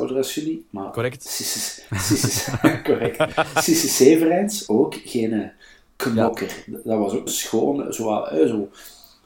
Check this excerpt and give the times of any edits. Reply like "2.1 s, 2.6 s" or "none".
4.7 s, 7.3 s